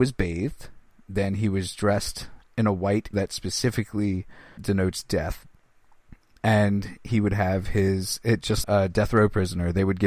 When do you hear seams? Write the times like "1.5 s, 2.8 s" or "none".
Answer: 3.1 s, 4.6 s, 8.6 s